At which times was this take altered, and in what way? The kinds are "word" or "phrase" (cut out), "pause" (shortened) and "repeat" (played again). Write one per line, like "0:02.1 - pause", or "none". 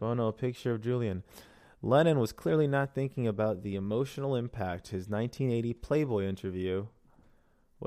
none